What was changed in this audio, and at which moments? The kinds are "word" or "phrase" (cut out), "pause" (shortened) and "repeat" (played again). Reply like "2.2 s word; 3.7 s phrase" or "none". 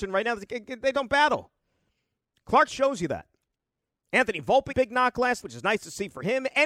0.9 s word; 2.7 s word; 4.7 s word; 5.4 s word